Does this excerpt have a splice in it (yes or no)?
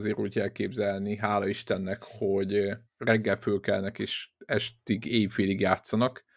yes